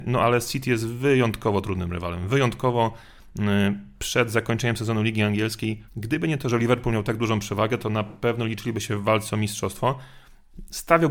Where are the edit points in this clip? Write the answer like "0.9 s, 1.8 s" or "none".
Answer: 5.9 s

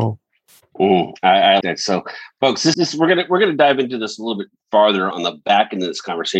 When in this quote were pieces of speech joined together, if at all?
1.6 s, 2.7 s, 5.1 s

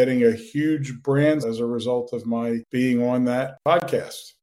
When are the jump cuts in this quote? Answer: 1.4 s

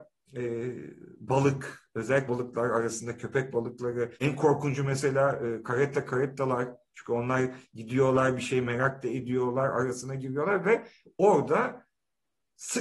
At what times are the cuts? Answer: 2.3 s, 4.1 s

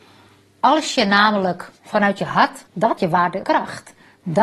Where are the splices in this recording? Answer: 1.8 s, 2.7 s, 3.0 s, 3.4 s

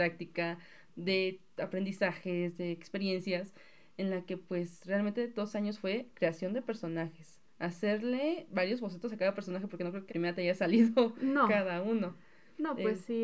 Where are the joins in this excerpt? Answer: 10.1 s

